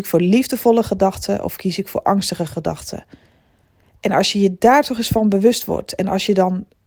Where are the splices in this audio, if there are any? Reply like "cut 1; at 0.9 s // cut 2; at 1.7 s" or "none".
none